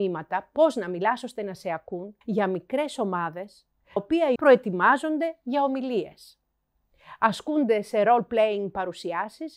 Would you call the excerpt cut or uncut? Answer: cut